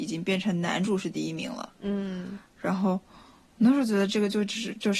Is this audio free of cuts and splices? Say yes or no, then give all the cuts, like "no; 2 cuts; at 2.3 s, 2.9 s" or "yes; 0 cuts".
yes; 0 cuts